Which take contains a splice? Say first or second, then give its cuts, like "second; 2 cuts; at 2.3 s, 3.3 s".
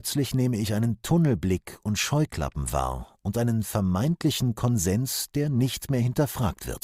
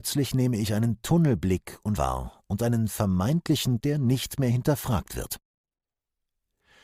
second; 2 cuts; at 2.0 s, 3.8 s